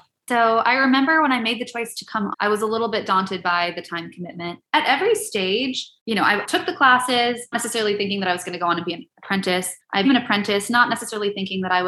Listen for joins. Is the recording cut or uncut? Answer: cut